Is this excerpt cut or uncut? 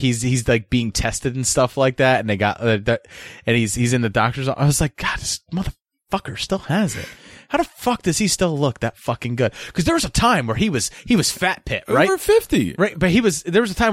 uncut